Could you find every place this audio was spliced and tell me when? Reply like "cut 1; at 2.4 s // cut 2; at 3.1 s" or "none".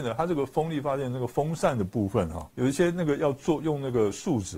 cut 1; at 2.5 s

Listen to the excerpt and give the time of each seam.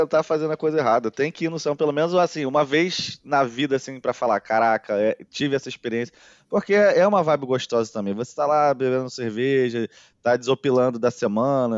none

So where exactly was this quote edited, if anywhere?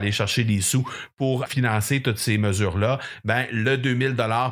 cut 1; at 1.5 s

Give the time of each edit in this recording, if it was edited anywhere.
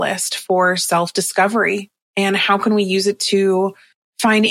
cut 1; at 2.0 s

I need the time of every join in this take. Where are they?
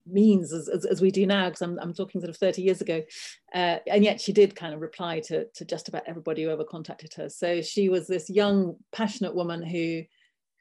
none

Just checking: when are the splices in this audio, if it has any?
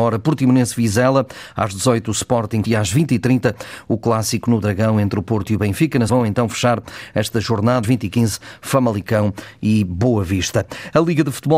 cut 1; at 2.6 s // cut 2; at 6.1 s // cut 3; at 7.8 s

